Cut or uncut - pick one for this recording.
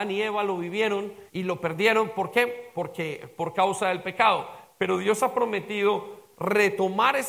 cut